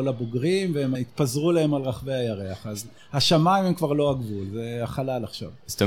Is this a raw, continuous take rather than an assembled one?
no; 1 cut; at 0.9 s

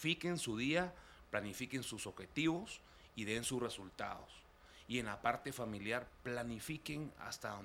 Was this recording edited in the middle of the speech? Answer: no; 0 cuts

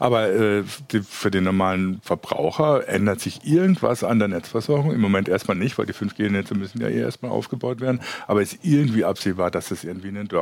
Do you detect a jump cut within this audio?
no; 0 cuts

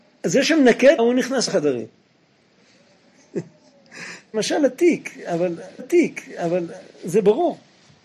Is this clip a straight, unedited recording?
no; 4 cuts; at 1.0 s, 1.5 s, 4.3 s, 5.8 s

